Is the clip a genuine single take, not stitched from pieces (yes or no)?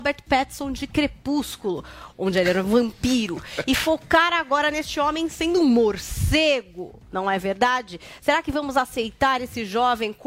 yes